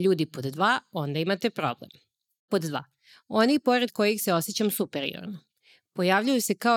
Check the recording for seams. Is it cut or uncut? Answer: uncut